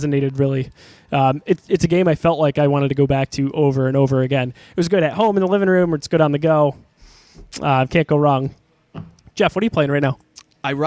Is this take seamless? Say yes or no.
yes